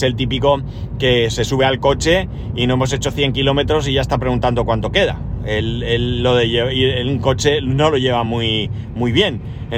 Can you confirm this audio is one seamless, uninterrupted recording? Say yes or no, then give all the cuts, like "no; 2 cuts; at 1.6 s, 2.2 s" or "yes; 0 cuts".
yes; 0 cuts